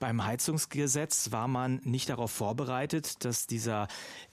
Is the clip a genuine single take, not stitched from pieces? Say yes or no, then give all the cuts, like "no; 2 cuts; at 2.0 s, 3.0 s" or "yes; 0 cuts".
yes; 0 cuts